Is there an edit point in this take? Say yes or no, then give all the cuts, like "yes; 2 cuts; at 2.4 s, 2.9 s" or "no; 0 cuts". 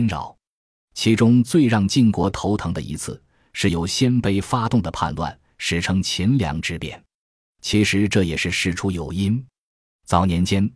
no; 0 cuts